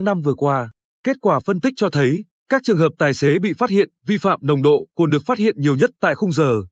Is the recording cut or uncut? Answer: uncut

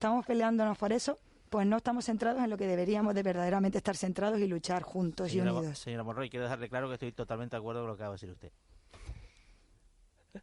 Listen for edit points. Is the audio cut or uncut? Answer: uncut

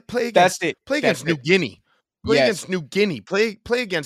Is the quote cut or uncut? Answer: uncut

